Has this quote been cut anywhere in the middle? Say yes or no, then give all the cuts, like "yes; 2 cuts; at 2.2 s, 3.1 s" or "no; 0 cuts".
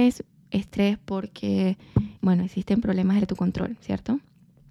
yes; 2 cuts; at 2.2 s, 3.2 s